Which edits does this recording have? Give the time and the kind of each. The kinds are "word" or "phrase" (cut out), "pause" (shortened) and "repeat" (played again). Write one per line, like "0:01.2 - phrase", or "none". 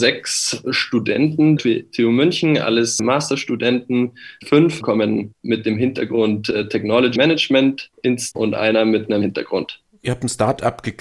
0:01.6 - word
0:04.8 - word
0:07.2 - word
0:08.3 - word
0:09.2 - word